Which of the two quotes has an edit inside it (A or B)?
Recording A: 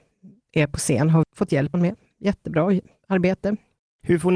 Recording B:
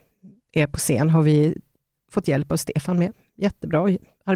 A